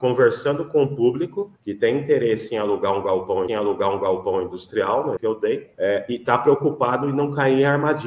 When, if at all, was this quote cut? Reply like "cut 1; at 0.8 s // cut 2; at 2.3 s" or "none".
cut 1; at 1.6 s // cut 2; at 3.5 s // cut 3; at 5.2 s // cut 4; at 5.7 s